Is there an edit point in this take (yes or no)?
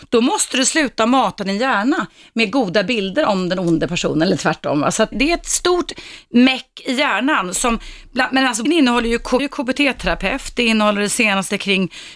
yes